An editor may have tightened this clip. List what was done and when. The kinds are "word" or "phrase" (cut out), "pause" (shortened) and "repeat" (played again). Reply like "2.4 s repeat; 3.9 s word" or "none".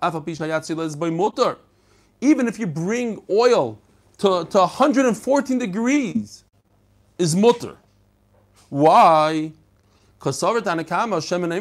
none